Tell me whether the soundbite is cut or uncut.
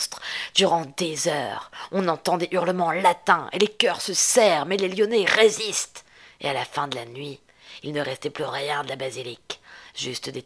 uncut